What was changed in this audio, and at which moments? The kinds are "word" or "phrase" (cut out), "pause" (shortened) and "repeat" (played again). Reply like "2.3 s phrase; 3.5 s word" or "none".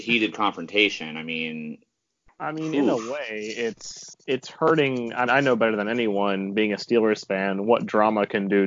4.1 s word; 5.3 s word